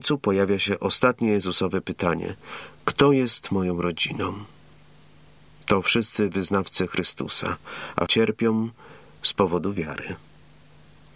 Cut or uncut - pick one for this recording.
cut